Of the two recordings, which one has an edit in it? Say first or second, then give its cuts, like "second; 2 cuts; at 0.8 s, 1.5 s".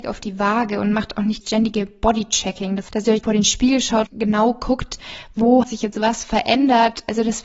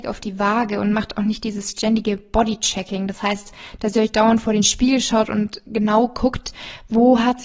first; 5 cuts; at 1.4 s, 2.9 s, 3.2 s, 4.1 s, 5.6 s